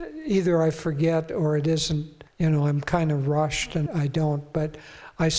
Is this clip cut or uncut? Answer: cut